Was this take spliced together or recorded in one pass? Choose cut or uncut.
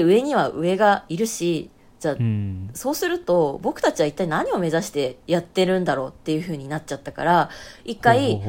uncut